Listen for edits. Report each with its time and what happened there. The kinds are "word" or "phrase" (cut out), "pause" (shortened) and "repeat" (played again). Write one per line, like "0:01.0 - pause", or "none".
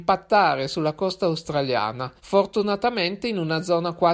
0:02.2 - pause